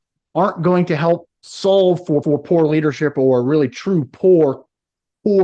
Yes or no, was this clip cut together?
yes